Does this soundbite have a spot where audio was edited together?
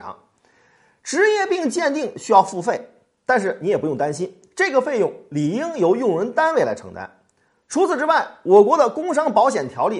no; 0 cuts

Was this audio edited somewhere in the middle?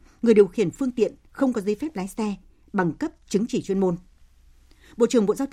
no; 0 cuts

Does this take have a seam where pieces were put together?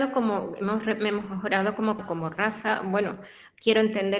yes; 1 cut; at 2.0 s

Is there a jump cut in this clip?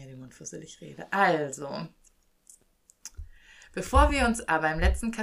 no; 0 cuts

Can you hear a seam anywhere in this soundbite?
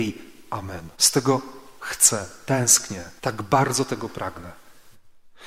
yes; 2 cuts; at 0.9 s, 3.2 s

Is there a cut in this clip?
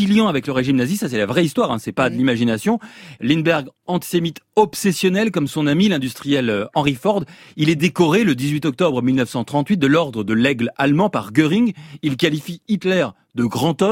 no; 0 cuts

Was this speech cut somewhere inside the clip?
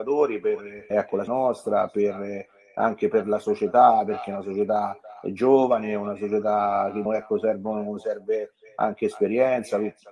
yes; 3 cuts; at 0.9 s, 1.3 s, 7.1 s

